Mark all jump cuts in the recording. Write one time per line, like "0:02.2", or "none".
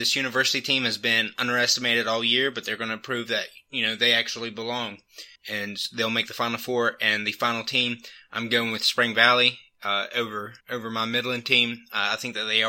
0:05.4
0:10.6